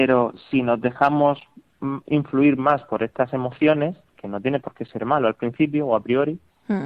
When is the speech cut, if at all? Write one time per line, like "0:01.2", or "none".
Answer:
none